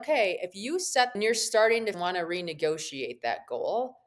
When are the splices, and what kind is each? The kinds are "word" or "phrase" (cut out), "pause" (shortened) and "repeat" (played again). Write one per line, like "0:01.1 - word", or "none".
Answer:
0:01.1 - phrase
0:01.9 - phrase